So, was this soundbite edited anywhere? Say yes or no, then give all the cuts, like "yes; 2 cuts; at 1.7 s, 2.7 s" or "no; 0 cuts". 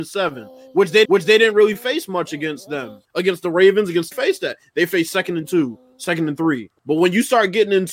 yes; 4 cuts; at 1.0 s, 3.0 s, 4.1 s, 6.8 s